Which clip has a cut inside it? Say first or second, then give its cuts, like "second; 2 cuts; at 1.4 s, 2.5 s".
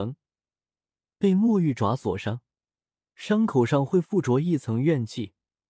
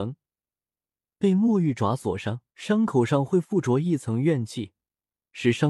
second; 1 cut; at 2.5 s